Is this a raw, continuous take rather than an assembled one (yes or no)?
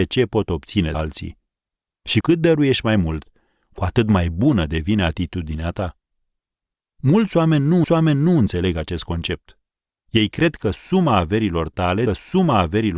no